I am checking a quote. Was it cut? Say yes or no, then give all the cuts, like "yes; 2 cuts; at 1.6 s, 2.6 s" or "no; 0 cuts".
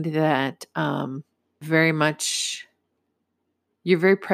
yes; 1 cut; at 1.6 s